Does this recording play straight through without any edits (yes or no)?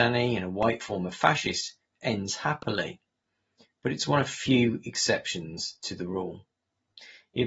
yes